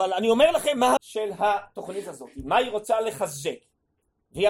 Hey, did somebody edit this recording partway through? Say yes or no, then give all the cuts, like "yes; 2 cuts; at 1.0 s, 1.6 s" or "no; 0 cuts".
yes; 1 cut; at 1.0 s